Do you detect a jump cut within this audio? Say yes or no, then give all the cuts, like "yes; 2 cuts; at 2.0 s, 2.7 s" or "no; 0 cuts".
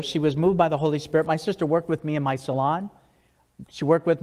no; 0 cuts